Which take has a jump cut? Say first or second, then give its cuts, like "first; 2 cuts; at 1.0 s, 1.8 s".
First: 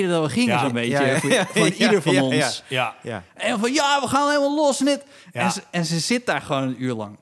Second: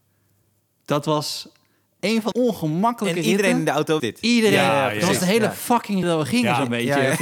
second; 3 cuts; at 2.3 s, 4.0 s, 6.0 s